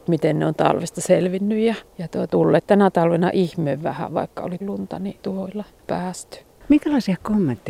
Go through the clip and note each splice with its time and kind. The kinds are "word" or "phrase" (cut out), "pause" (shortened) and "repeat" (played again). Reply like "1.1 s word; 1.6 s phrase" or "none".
1.9 s pause; 2.3 s phrase; 4.6 s word; 5.2 s phrase